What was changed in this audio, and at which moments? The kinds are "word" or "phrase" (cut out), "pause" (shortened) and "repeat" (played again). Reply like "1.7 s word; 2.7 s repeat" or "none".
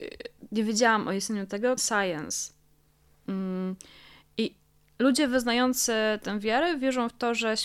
1.8 s word